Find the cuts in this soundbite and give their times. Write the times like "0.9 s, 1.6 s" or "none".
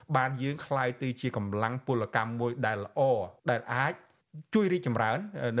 3.4 s